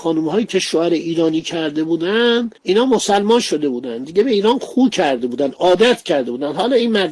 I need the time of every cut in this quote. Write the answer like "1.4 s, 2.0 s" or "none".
2.6 s